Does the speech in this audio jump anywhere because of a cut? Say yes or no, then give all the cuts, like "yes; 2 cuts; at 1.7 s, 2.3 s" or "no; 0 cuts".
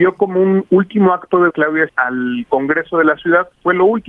yes; 2 cuts; at 1.5 s, 1.9 s